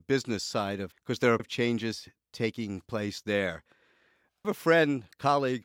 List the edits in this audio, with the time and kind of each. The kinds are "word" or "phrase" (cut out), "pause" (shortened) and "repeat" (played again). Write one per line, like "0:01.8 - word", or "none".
0:00.9 - word
0:01.4 - word
0:04.4 - word